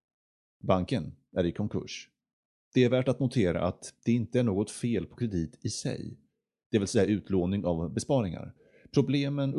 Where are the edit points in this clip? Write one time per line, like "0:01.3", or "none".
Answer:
none